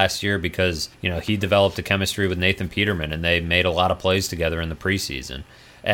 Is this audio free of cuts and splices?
no; 1 cut; at 0.9 s

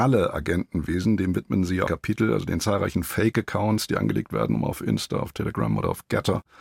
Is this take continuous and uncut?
no; 1 cut; at 1.9 s

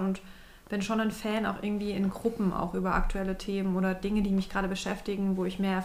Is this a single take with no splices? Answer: yes; 0 cuts

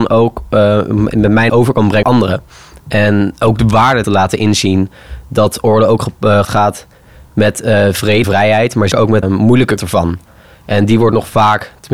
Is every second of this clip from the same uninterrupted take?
no; 8 cuts; at 1.5 s, 2.0 s, 4.0 s, 6.4 s, 8.2 s, 8.9 s, 9.2 s, 9.8 s

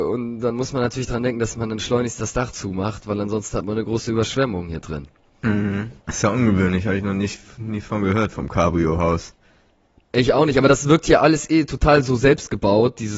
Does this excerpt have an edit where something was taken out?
yes; 1 cut; at 6.0 s

